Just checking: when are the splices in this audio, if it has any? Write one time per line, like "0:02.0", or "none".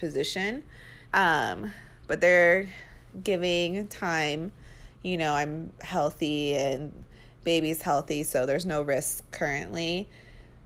0:01.0